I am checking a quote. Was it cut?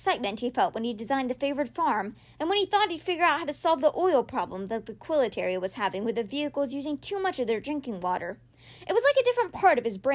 no; 0 cuts

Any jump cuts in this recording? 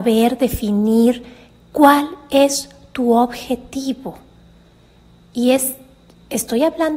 no; 0 cuts

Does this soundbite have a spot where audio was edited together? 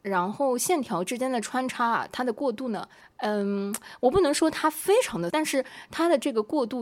yes; 2 cuts; at 3.0 s, 5.3 s

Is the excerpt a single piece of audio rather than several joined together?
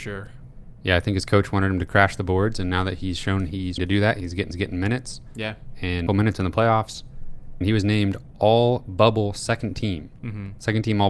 no; 4 cuts; at 3.8 s, 4.5 s, 6.1 s, 7.6 s

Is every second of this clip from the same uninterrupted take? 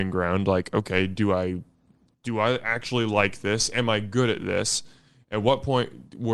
yes; 0 cuts

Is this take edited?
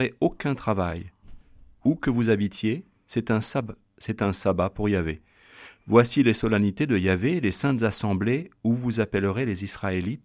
no; 0 cuts

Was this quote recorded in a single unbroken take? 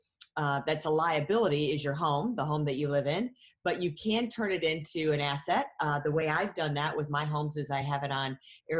yes; 0 cuts

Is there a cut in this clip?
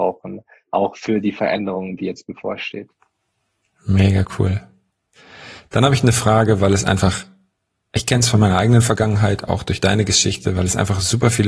no; 0 cuts

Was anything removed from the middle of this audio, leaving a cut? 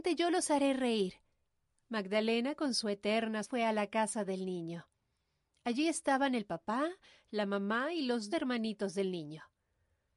yes; 3 cuts; at 1.4 s, 3.4 s, 8.3 s

